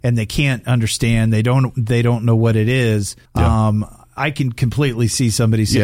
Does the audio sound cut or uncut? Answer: cut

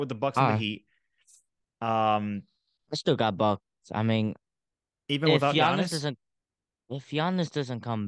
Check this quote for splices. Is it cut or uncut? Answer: uncut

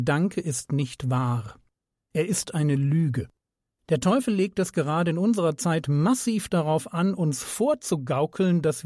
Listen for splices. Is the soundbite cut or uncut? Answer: uncut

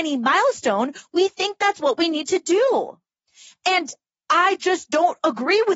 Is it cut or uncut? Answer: uncut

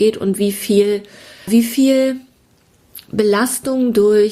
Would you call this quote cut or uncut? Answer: cut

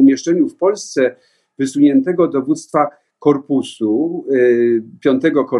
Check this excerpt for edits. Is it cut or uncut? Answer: uncut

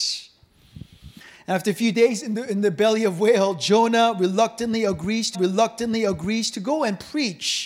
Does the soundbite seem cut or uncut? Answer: cut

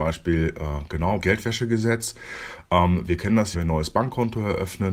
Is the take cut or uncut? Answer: cut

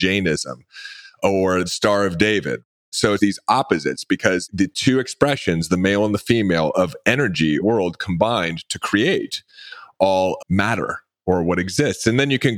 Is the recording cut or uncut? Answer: cut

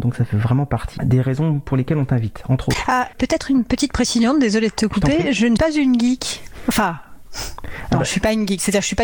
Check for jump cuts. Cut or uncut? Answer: cut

